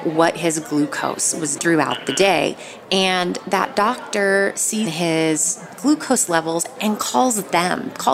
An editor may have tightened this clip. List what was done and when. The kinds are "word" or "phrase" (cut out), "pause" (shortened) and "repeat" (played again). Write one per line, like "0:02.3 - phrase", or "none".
0:01.6 - word
0:04.9 - phrase